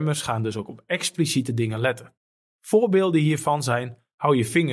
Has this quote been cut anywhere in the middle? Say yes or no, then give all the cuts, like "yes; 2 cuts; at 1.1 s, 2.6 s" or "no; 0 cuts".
no; 0 cuts